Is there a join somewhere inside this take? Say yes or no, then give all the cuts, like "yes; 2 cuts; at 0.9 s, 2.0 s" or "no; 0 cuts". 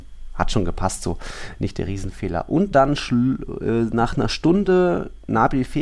no; 0 cuts